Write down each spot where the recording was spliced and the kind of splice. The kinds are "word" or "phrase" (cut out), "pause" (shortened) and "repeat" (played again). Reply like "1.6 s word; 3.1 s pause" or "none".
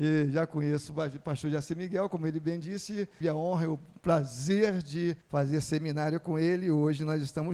3.2 s word; 5.2 s pause